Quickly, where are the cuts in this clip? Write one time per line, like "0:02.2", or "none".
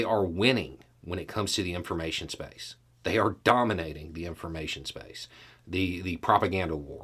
none